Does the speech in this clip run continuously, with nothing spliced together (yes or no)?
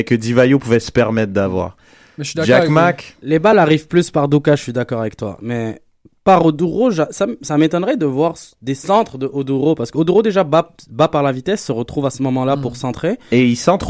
yes